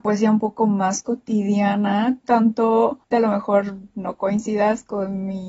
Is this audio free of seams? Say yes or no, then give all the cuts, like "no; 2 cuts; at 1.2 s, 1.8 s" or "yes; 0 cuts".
no; 2 cuts; at 2.2 s, 3.1 s